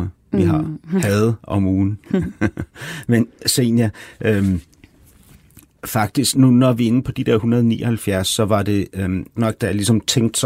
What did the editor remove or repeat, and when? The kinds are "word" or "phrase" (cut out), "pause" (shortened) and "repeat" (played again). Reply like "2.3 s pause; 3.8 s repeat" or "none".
6.3 s word; 9.4 s word

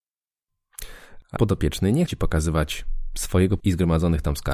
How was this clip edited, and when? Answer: 1.4 s word; 2.1 s word; 3.6 s word

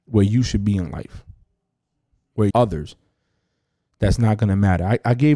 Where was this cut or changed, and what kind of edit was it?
2.5 s phrase

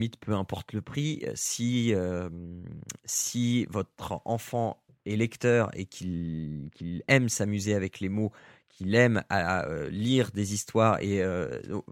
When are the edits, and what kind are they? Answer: none

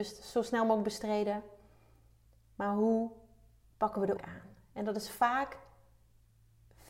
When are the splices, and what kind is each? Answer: 4.2 s word

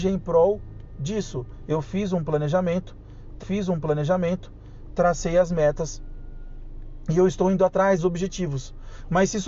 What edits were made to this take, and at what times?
3.4 s repeat; 8.0 s word

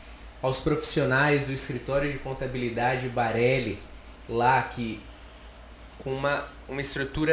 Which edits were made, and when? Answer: none

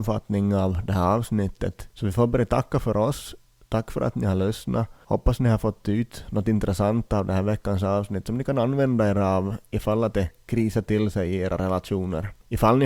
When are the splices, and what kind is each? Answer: none

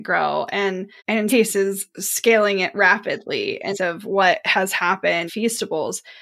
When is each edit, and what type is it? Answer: 1.0 s pause; 1.3 s word; 3.7 s phrase; 5.3 s word

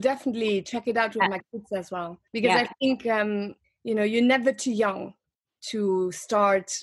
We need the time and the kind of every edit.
2.3 s pause; 3.6 s pause

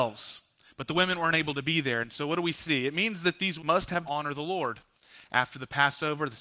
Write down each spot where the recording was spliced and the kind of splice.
3.6 s word; 4.1 s phrase

